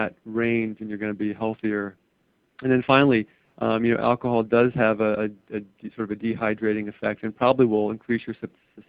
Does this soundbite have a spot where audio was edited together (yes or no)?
no